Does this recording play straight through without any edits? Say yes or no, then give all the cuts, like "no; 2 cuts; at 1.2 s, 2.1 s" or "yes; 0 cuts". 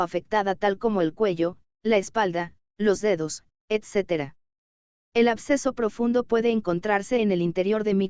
yes; 0 cuts